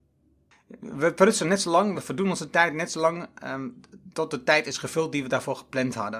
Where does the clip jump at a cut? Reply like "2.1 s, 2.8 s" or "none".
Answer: none